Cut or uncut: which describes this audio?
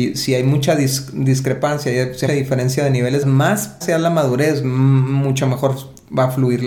cut